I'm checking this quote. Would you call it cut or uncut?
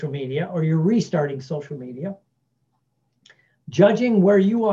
uncut